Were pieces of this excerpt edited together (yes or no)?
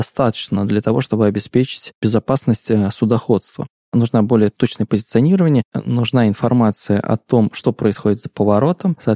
no